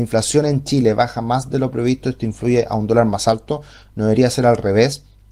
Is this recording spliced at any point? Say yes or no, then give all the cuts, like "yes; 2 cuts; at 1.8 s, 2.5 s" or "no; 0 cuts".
no; 0 cuts